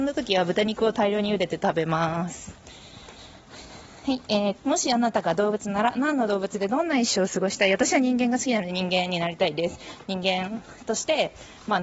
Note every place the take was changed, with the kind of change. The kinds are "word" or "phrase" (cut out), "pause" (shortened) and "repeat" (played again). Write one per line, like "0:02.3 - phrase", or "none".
0:04.6 - word